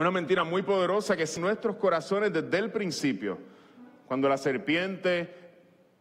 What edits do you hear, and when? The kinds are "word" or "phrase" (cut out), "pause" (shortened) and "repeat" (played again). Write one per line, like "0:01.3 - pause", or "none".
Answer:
0:01.4 - phrase

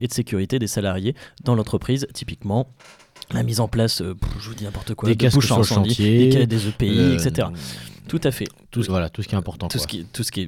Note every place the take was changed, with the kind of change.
0:08.9 - phrase

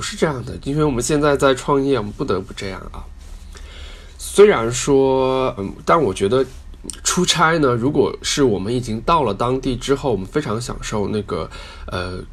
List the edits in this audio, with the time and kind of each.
0:05.6 - word
0:06.8 - word

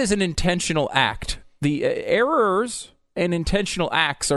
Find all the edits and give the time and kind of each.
none

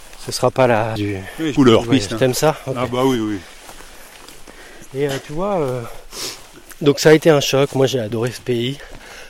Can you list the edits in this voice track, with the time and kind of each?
0:01.0 - word
0:01.6 - phrase

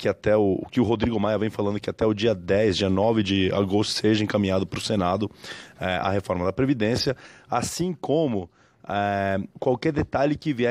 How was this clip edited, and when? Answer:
0:09.5 - pause

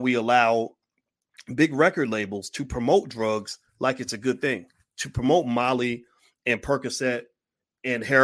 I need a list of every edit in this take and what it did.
0:03.7 - pause

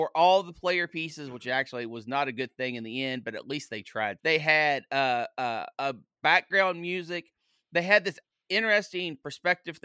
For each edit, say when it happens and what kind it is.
0:04.2 - word
0:05.7 - pause

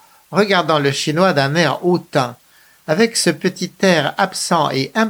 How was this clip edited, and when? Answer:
none

